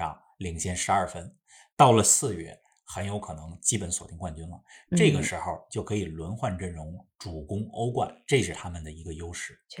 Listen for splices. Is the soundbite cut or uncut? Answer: uncut